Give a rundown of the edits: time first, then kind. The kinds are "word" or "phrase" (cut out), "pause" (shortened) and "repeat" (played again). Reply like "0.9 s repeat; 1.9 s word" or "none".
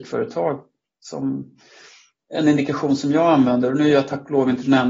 none